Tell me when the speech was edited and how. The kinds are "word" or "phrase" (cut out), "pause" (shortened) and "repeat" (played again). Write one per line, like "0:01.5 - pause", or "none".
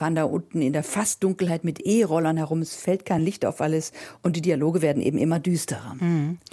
none